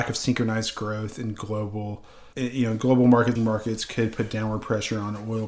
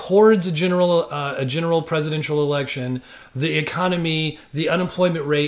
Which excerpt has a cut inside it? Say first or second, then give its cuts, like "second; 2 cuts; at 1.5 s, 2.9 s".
first; 2 cuts; at 2.3 s, 3.4 s